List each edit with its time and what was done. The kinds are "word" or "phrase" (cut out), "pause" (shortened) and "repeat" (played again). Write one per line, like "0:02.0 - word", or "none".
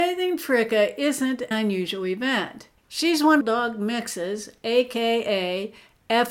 0:01.5 - word
0:02.8 - pause
0:03.4 - phrase